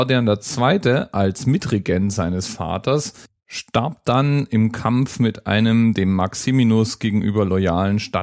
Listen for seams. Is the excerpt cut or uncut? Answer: uncut